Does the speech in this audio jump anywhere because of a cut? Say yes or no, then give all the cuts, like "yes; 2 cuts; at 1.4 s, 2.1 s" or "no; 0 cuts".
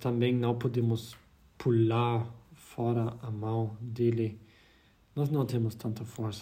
no; 0 cuts